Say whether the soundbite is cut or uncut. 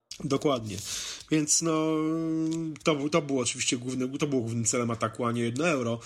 uncut